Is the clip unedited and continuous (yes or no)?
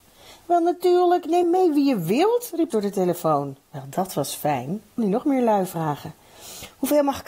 no